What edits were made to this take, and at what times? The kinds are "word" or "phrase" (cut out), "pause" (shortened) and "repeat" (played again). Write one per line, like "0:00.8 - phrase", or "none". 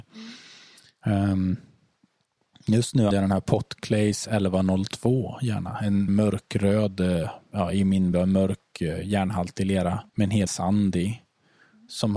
0:03.1 - word
0:06.1 - word
0:08.1 - word
0:10.1 - pause
0:10.5 - word